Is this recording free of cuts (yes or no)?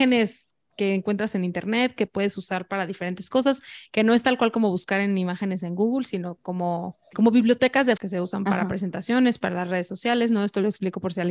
no